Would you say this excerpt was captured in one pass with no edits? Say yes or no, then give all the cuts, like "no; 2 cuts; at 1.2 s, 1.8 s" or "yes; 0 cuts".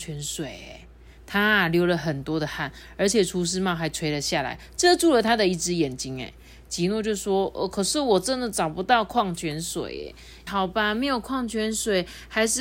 no; 1 cut; at 10.5 s